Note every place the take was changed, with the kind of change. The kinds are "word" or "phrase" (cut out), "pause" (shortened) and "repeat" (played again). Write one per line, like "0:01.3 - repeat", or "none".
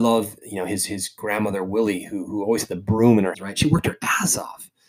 0:03.3 - word